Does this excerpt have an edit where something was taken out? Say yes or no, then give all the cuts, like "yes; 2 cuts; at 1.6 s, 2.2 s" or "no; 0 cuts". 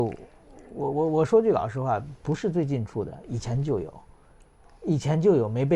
no; 0 cuts